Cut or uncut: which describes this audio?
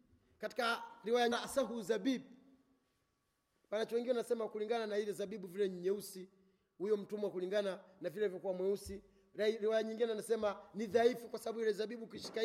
cut